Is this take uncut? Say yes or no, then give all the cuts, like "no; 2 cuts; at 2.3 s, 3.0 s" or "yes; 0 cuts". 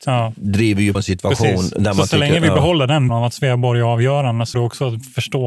no; 3 cuts; at 0.9 s, 3.1 s, 4.5 s